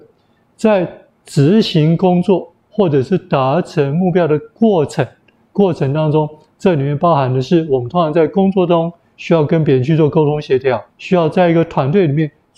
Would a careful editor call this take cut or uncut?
cut